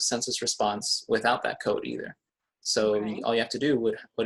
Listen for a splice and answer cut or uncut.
uncut